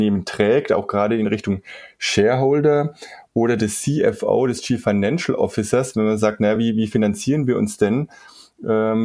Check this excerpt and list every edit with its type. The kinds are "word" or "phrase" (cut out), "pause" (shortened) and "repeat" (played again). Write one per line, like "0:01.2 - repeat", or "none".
none